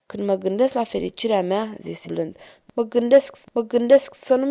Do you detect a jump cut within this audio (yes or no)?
yes